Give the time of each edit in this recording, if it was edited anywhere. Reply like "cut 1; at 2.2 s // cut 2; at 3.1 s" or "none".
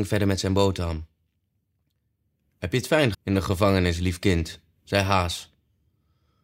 cut 1; at 3.1 s